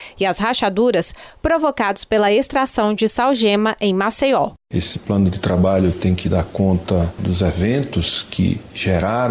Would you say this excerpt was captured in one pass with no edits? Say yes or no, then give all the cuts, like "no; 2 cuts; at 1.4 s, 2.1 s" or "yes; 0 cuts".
yes; 0 cuts